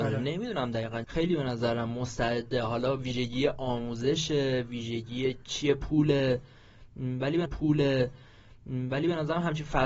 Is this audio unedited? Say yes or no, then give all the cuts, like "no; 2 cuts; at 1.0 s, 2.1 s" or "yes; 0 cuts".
no; 2 cuts; at 1.0 s, 7.5 s